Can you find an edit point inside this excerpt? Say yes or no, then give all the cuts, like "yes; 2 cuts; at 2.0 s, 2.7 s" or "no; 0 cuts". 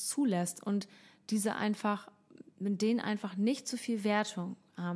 no; 0 cuts